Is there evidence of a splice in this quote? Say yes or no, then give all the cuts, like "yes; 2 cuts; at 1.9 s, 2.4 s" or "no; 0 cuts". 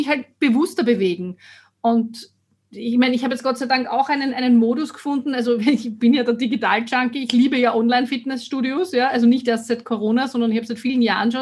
no; 0 cuts